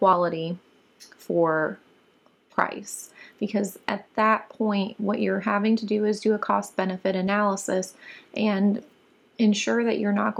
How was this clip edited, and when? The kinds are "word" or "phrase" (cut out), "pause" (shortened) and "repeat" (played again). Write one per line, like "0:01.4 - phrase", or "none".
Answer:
none